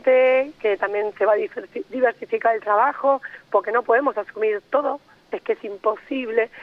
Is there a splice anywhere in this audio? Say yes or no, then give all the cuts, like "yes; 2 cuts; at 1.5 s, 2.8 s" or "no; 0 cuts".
no; 0 cuts